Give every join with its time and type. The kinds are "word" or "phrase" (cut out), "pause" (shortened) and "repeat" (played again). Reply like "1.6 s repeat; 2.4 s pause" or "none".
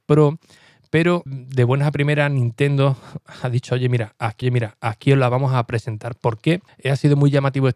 1.3 s word; 4.4 s repeat; 6.7 s pause